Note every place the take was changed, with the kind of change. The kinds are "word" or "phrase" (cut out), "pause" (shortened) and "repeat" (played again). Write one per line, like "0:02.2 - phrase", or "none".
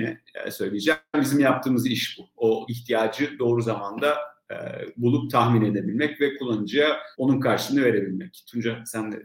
0:02.7 - word
0:07.1 - pause

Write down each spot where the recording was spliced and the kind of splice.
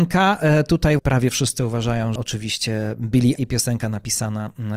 0:01.0 - word
0:02.2 - word
0:03.4 - word

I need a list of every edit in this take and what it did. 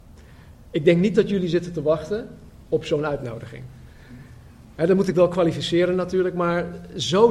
none

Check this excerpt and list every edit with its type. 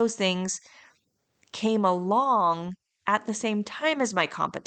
none

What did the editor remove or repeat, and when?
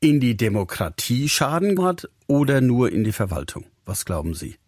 0:01.8 - word

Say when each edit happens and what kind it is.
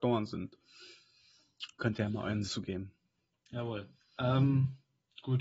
0:02.5 - word

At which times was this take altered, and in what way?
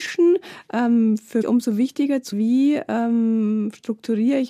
0:01.4 - word
0:02.3 - word

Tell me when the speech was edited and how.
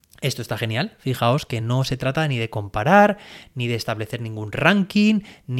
none

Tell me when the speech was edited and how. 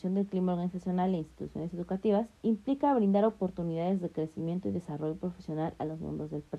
0:02.4 - pause

